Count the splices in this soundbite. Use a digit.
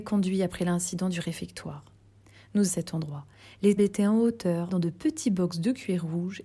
3